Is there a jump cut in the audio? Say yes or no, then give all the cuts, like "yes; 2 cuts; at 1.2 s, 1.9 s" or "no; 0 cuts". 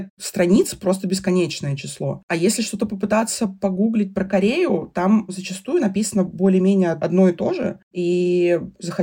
no; 0 cuts